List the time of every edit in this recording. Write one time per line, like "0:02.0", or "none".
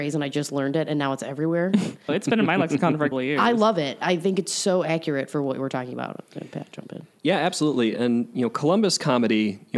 0:02.1
0:03.1